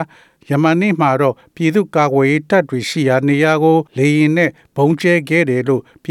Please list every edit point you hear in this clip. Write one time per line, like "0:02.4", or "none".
0:03.9